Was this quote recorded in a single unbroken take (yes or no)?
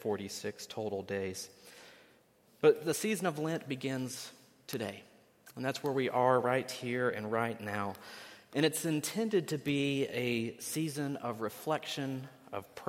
yes